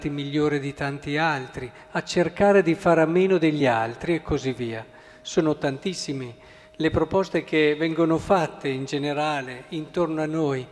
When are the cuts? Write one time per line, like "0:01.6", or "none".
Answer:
none